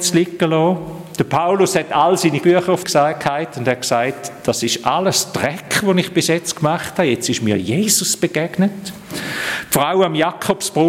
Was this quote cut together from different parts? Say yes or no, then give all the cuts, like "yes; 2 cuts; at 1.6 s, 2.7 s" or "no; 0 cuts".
yes; 2 cuts; at 2.4 s, 2.8 s